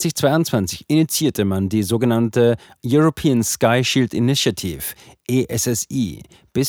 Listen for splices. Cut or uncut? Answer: uncut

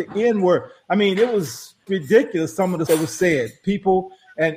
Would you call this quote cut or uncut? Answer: cut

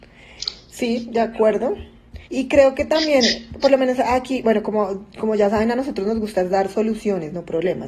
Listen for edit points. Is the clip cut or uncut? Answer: cut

